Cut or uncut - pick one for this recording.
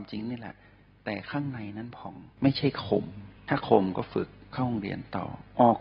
cut